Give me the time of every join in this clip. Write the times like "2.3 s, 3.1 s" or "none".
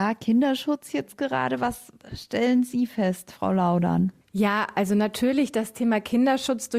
4.2 s